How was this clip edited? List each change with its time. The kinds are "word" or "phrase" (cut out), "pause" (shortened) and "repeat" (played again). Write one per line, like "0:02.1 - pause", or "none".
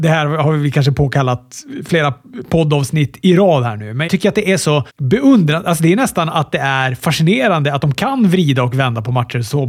0:04.1 - word
0:04.9 - pause